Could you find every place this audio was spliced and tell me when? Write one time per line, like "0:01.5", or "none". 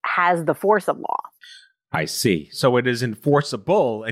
none

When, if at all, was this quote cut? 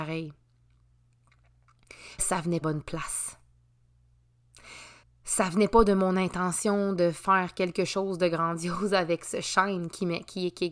0:02.2
0:02.6
0:05.0

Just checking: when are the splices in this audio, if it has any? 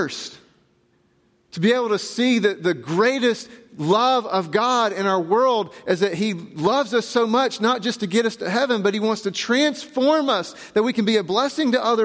0:00.9

